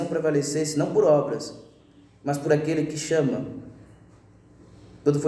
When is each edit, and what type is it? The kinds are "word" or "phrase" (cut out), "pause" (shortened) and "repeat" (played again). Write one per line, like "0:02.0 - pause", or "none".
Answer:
none